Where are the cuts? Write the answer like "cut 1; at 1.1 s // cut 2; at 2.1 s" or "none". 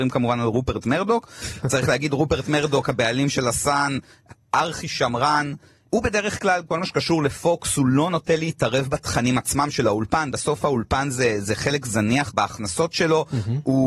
none